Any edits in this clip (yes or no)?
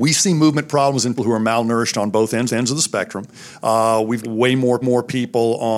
yes